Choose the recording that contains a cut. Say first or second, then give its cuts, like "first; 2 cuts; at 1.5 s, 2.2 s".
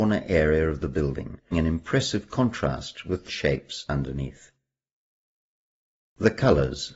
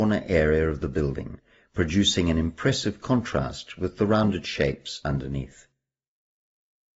first; 2 cuts; at 1.5 s, 3.3 s